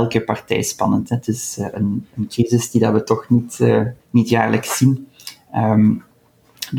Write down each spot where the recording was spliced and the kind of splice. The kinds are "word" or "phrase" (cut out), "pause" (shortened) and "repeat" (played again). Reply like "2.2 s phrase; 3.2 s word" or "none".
4.0 s pause

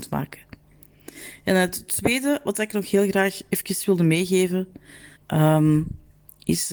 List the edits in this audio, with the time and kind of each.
5.2 s pause

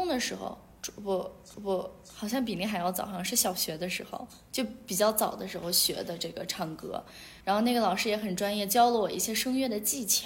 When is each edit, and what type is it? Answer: 1.5 s repeat; 7.4 s pause

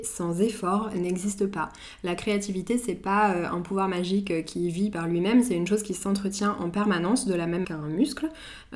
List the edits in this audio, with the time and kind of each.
7.6 s word

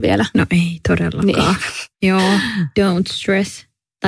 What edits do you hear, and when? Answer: 1.9 s pause

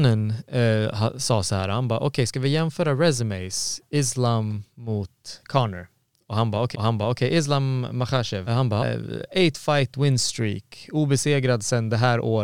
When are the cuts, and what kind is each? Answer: 6.7 s repeat; 8.5 s word; 8.8 s word

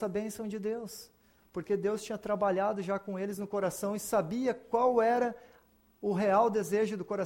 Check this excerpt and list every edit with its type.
none

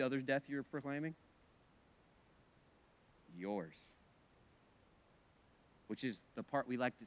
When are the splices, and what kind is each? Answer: none

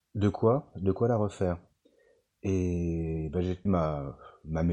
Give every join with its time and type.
3.7 s word

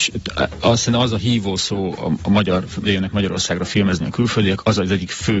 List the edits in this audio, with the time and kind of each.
2.8 s phrase

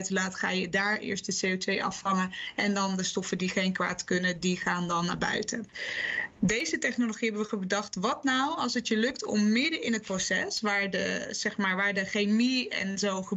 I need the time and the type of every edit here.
none

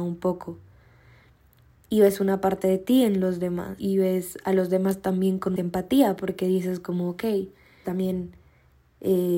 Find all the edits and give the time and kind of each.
3.8 s word; 5.6 s word; 7.8 s word

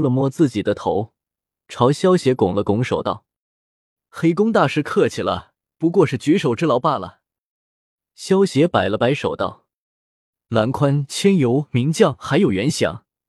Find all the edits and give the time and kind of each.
5.6 s pause

